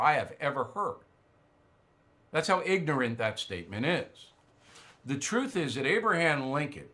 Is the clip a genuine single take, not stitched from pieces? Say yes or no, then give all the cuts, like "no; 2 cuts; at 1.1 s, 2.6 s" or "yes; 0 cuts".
yes; 0 cuts